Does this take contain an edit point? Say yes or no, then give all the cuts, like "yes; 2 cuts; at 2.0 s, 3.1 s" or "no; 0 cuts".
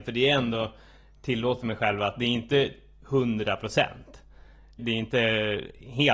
yes; 1 cut; at 4.8 s